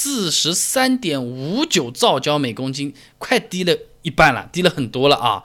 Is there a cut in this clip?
no; 0 cuts

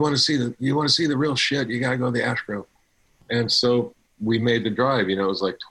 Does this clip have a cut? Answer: no; 0 cuts

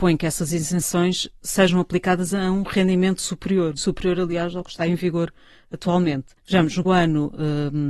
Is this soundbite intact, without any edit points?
no; 3 cuts; at 3.8 s, 6.4 s, 6.8 s

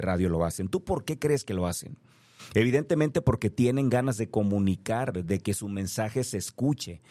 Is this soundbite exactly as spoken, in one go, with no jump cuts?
yes; 0 cuts

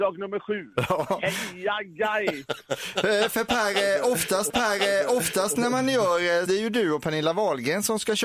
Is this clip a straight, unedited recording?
no; 2 cuts; at 4.5 s, 6.5 s

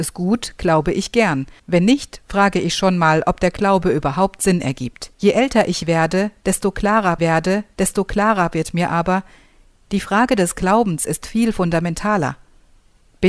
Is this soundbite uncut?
no; 3 cuts; at 1.6 s, 5.1 s, 7.2 s

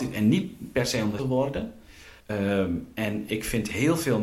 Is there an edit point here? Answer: yes; 3 cuts; at 1.2 s, 2.2 s, 3.3 s

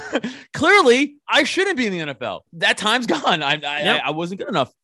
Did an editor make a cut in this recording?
yes; 1 cut; at 2.5 s

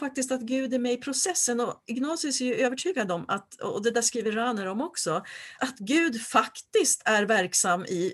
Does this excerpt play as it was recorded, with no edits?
no; 1 cut; at 5.6 s

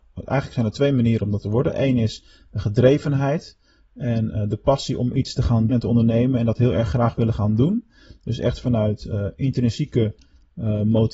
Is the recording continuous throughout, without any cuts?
no; 1 cut; at 5.7 s

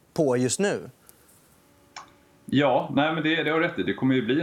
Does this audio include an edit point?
no; 0 cuts

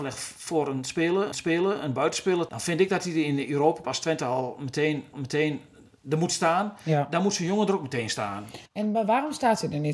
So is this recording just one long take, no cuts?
no; 5 cuts; at 1.3 s, 2.5 s, 3.8 s, 5.1 s, 8.7 s

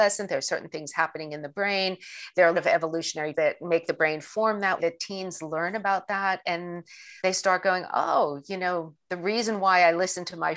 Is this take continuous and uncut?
no; 4 cuts; at 2.5 s, 3.3 s, 4.8 s, 7.2 s

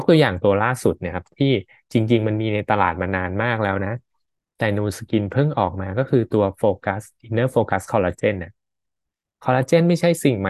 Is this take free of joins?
yes; 0 cuts

